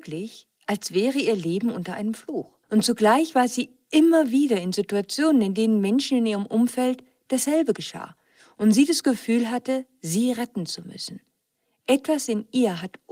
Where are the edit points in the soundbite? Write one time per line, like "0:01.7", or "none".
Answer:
0:02.6